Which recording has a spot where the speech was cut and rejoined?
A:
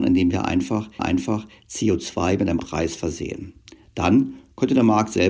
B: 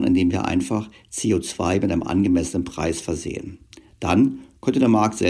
A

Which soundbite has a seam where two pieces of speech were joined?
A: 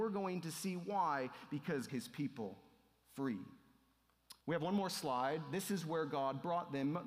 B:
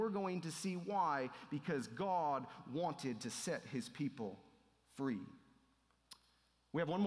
A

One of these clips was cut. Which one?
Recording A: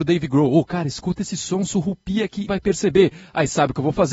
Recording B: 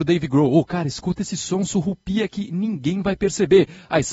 A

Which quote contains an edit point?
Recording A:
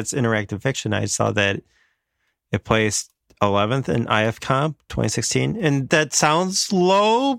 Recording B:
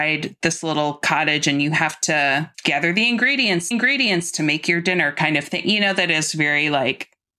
B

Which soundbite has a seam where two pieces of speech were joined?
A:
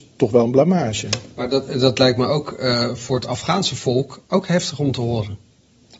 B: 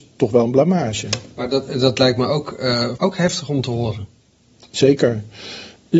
B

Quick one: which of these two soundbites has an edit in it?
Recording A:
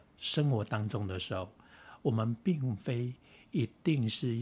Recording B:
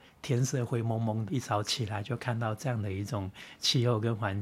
B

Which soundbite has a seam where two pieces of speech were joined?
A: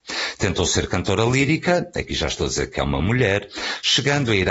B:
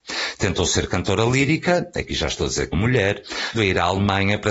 B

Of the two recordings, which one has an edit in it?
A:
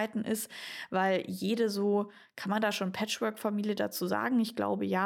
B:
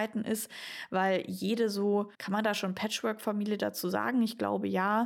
B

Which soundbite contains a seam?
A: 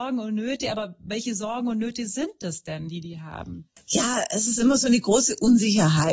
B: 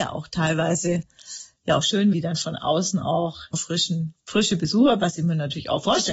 B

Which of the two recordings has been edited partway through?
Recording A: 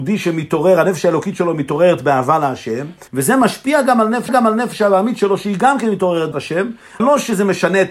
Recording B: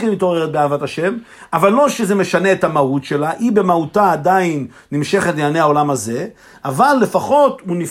A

